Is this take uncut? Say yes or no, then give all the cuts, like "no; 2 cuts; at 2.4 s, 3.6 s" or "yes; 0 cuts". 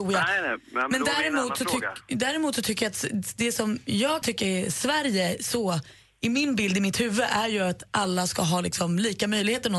no; 1 cut; at 4.2 s